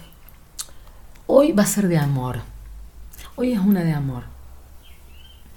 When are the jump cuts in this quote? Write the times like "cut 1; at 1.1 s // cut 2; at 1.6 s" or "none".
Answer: none